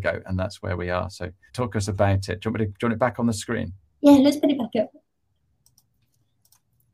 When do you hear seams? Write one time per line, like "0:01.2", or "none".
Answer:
0:01.5